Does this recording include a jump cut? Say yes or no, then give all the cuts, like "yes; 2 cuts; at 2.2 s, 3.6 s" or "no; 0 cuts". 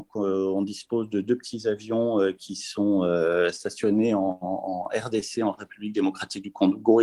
no; 0 cuts